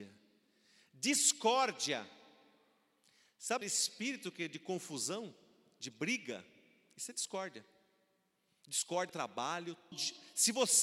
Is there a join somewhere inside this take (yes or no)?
yes